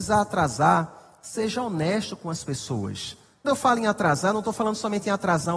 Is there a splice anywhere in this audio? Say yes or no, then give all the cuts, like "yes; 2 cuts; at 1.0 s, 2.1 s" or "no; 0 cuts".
yes; 1 cut; at 3.4 s